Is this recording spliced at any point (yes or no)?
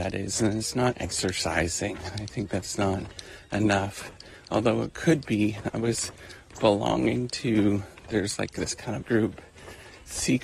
yes